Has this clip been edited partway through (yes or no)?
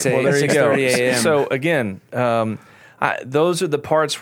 no